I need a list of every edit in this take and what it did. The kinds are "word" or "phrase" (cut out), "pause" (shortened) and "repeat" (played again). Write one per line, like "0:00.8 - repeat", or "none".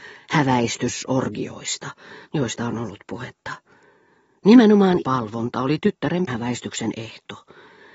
0:02.2 - pause
0:05.0 - word
0:06.3 - word